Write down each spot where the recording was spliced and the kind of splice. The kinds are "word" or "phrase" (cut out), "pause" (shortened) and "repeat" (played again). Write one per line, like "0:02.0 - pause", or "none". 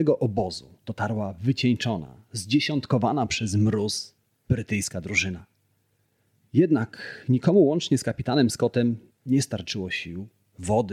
none